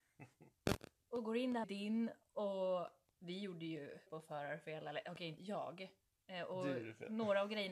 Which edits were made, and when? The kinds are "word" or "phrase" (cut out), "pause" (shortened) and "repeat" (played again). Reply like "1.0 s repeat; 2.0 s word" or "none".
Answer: 1.6 s word; 3.1 s pause; 4.1 s word; 5.4 s word